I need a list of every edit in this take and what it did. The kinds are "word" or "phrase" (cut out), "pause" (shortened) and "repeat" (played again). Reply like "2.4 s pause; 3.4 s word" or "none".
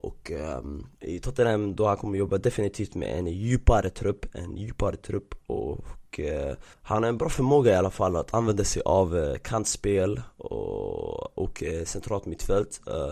0.9 s pause

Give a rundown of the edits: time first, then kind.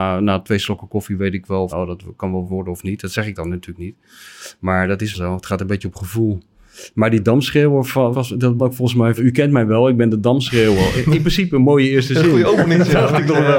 1.7 s word; 2.5 s word; 5.1 s word; 8.1 s word; 8.6 s word; 9.2 s word

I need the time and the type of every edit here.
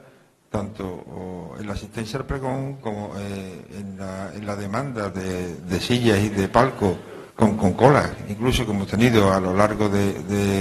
7.3 s pause

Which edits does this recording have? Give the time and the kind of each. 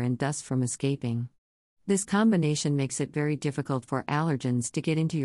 none

